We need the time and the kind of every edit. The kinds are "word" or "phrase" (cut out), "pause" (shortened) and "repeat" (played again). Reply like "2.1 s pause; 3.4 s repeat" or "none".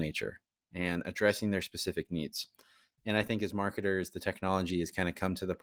none